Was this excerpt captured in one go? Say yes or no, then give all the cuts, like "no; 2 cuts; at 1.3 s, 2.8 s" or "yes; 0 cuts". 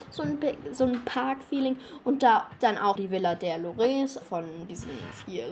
no; 3 cuts; at 2.6 s, 3.0 s, 4.2 s